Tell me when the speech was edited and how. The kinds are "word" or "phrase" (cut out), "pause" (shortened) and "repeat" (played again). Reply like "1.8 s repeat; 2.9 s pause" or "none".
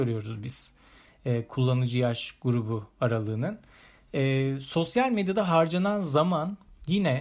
none